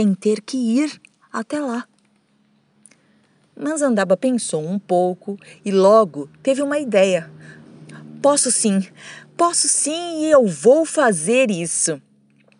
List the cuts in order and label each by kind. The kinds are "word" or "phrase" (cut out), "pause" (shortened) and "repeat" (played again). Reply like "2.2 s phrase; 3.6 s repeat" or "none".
none